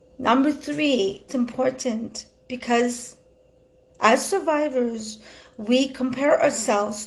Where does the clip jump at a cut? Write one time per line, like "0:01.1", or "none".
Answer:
0:01.3